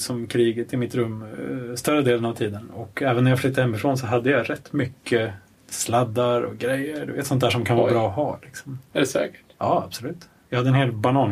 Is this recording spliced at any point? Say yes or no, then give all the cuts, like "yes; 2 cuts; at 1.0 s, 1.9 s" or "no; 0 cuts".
no; 0 cuts